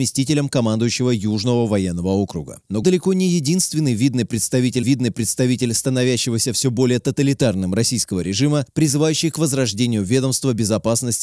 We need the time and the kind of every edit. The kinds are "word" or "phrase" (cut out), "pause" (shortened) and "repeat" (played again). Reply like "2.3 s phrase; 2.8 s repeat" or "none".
2.8 s word; 4.8 s repeat